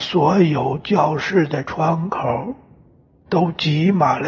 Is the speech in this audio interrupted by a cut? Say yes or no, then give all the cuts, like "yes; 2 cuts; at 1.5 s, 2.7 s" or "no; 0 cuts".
no; 0 cuts